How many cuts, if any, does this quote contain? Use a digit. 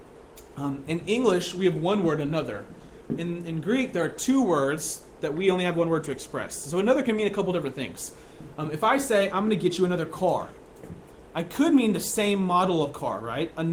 0